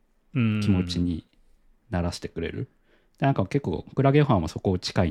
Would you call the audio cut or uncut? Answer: uncut